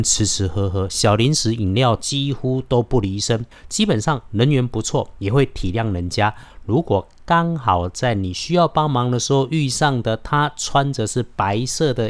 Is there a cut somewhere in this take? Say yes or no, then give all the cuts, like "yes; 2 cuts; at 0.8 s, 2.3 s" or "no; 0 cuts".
no; 0 cuts